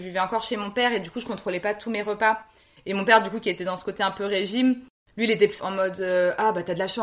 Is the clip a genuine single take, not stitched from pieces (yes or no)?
no